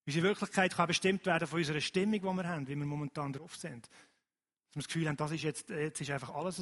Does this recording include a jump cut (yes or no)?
no